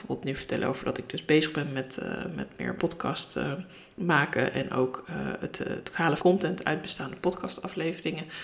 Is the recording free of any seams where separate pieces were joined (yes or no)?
no